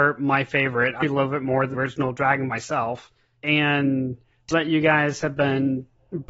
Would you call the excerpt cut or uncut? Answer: cut